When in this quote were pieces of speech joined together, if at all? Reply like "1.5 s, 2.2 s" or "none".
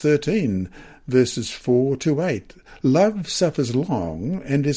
none